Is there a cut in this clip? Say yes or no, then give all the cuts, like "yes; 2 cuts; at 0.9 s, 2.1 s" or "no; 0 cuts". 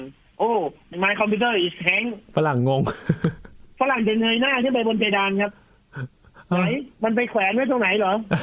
yes; 2 cuts; at 2.3 s, 6.9 s